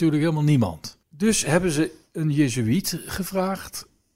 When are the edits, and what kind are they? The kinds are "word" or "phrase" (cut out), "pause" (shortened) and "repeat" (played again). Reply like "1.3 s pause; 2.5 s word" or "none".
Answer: 1.0 s pause